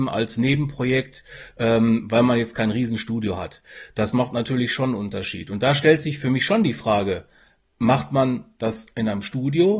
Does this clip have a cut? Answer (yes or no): no